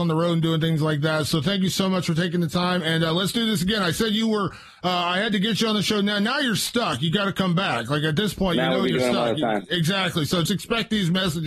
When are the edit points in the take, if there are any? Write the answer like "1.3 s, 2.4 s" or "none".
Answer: 10.5 s